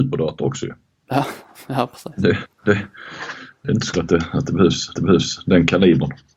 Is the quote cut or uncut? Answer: cut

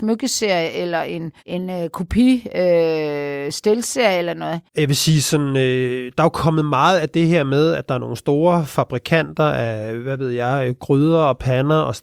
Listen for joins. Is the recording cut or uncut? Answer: cut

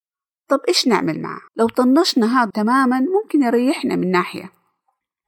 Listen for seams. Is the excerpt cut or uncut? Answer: cut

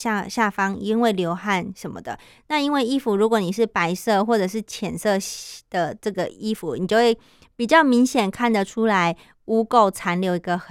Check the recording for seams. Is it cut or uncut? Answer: uncut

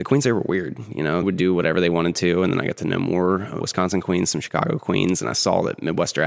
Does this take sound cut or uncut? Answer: cut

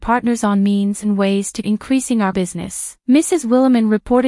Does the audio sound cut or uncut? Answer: cut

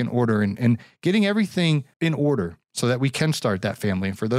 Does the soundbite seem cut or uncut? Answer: cut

